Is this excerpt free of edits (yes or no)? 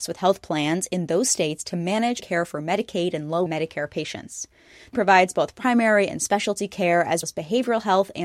no